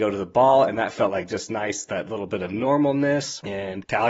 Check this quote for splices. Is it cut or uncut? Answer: uncut